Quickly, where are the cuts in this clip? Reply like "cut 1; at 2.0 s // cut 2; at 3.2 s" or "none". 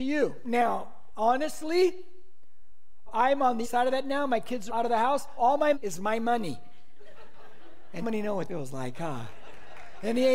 cut 1; at 3.1 s // cut 2; at 3.6 s // cut 3; at 4.7 s // cut 4; at 5.4 s // cut 5; at 5.7 s // cut 6; at 8.0 s // cut 7; at 8.5 s